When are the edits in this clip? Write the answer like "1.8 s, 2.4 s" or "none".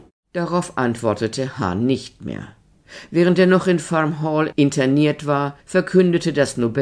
5.6 s